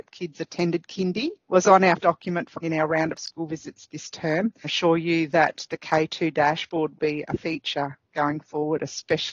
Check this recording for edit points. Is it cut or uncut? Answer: cut